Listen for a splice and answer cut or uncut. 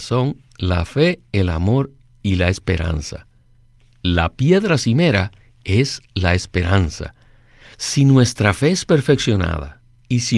uncut